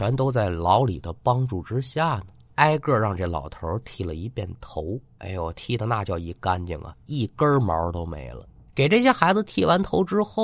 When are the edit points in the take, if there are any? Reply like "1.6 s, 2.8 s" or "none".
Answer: 8.7 s